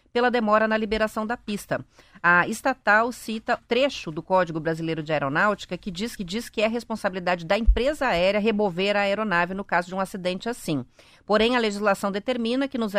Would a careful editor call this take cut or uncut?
cut